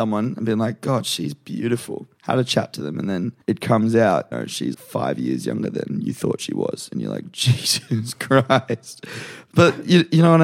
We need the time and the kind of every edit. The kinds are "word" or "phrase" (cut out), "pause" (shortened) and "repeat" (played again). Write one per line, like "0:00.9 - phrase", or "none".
0:02.1 - pause
0:03.4 - pause
0:04.3 - phrase
0:04.7 - word